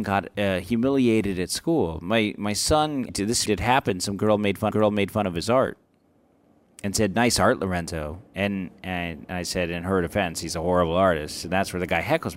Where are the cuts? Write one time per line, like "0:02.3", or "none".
0:03.1
0:03.5
0:04.7